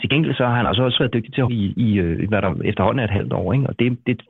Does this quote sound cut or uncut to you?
cut